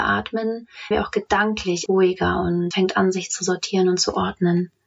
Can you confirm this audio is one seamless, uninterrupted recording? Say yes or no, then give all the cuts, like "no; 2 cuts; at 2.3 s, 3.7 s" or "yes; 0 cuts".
no; 3 cuts; at 0.9 s, 1.9 s, 2.7 s